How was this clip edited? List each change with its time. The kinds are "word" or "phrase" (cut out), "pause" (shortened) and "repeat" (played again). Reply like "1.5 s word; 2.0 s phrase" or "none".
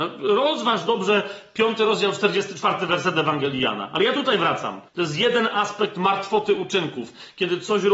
4.9 s pause